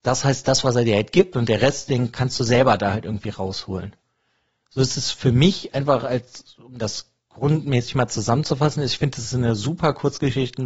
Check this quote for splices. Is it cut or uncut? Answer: uncut